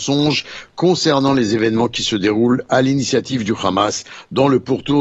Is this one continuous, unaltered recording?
yes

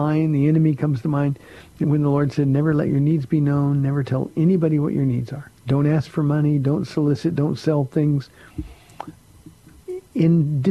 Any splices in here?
yes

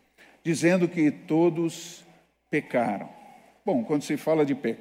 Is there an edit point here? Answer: no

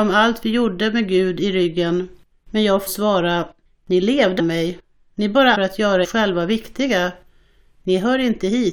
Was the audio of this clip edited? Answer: yes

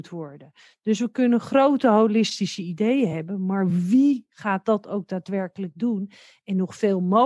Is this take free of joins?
yes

